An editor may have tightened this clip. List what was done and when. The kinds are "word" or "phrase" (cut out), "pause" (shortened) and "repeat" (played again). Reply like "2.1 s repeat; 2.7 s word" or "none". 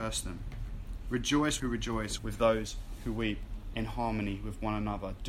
1.6 s phrase; 2.2 s word; 3.7 s word

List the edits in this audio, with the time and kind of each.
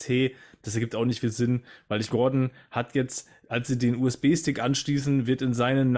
1.2 s word; 2.1 s word

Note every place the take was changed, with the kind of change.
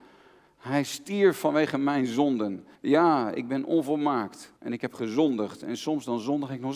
2.8 s pause; 4.6 s pause

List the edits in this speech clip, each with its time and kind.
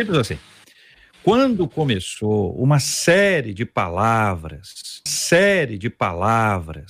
5.1 s repeat

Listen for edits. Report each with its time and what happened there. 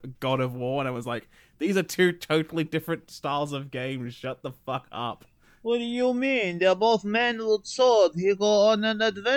none

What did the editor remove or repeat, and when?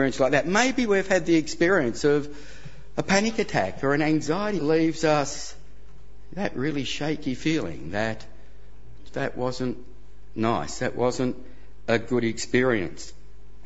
4.6 s phrase; 9.1 s word

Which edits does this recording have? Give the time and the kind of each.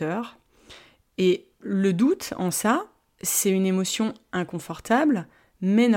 none

